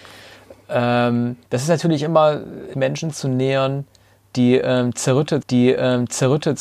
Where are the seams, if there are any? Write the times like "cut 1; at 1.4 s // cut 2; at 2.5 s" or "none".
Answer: cut 1; at 1.4 s // cut 2; at 2.7 s // cut 3; at 5.4 s